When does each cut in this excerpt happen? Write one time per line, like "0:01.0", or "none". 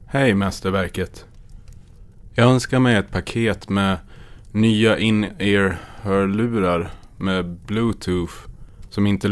none